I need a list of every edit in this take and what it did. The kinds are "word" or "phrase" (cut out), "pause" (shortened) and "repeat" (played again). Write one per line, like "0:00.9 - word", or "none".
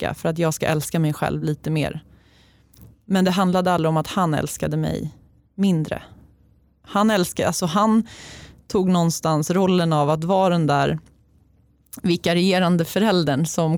none